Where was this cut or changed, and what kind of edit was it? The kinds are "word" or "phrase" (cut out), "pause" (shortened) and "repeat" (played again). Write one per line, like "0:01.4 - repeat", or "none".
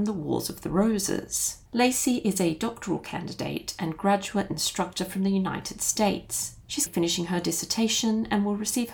0:06.9 - word